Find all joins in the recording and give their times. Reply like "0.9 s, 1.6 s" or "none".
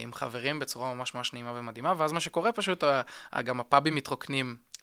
none